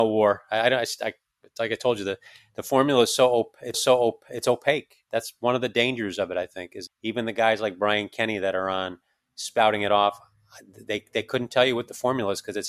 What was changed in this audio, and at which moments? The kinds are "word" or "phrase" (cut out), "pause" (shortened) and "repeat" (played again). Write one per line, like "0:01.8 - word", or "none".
0:03.7 - repeat
0:06.9 - word